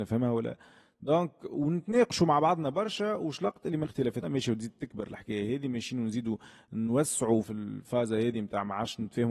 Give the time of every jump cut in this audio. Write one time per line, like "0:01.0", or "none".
0:03.8
0:04.2
0:07.4